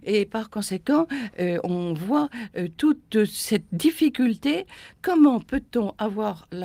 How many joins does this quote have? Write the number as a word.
one